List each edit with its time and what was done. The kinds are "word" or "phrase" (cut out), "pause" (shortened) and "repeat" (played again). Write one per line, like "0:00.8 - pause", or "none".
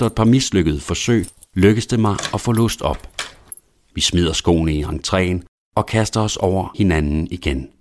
none